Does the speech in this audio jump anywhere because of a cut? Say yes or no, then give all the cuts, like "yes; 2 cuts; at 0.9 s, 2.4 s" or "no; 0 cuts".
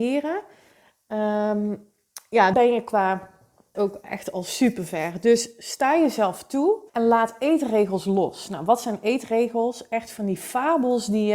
yes; 3 cuts; at 2.5 s, 3.7 s, 6.9 s